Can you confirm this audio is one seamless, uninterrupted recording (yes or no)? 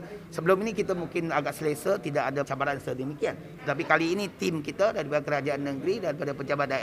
no